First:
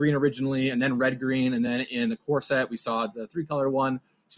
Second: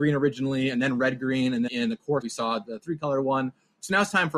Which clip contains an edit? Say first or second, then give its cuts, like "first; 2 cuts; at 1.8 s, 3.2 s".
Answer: second; 2 cuts; at 1.7 s, 2.2 s